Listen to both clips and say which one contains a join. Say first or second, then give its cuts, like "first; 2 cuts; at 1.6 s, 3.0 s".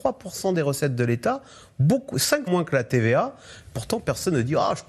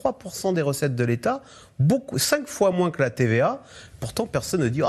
first; 1 cut; at 2.5 s